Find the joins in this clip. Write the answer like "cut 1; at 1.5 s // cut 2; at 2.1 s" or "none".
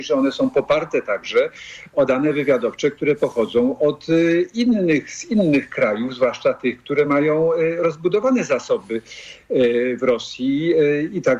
none

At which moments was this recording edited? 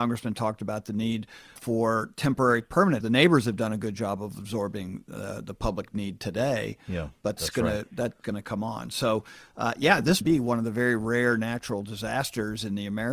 cut 1; at 1.6 s // cut 2; at 3.0 s // cut 3; at 7.4 s // cut 4; at 8.2 s // cut 5; at 10.2 s

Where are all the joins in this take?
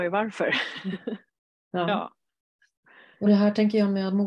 none

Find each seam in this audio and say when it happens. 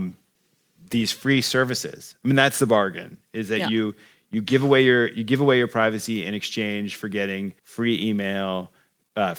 cut 1; at 7.6 s

